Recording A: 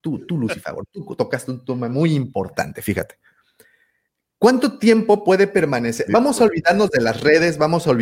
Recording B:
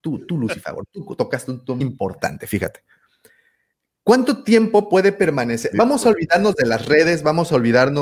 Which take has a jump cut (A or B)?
B